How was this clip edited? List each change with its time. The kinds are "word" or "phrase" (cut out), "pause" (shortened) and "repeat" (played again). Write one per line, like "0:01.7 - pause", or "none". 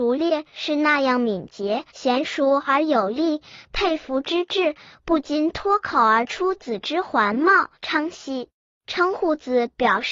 0:01.9 - pause
0:07.7 - pause
0:08.5 - pause